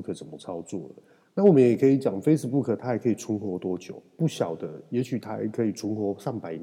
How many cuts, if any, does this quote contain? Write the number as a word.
zero